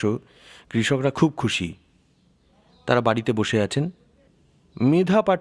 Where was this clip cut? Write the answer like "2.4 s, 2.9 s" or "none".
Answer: none